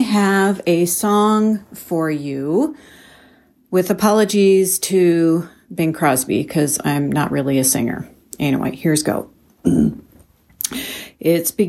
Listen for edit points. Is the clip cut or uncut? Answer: uncut